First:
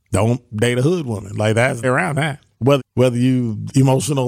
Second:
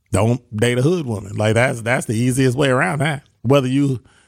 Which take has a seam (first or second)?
first